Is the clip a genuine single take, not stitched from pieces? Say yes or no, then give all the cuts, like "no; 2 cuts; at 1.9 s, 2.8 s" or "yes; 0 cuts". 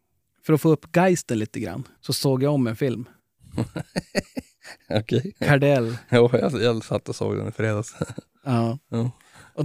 no; 3 cuts; at 2.0 s, 3.2 s, 5.3 s